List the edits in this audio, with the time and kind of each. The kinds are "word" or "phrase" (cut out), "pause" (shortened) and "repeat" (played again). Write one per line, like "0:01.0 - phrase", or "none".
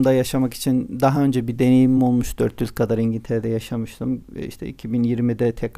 none